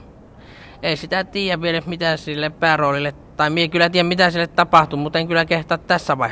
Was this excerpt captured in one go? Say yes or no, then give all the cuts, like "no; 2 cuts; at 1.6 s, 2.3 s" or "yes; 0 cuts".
yes; 0 cuts